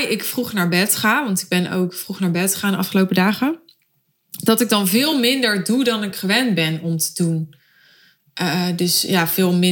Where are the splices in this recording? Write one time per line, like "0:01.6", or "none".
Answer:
none